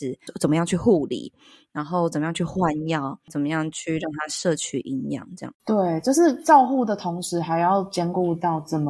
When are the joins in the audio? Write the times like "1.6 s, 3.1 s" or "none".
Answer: 5.6 s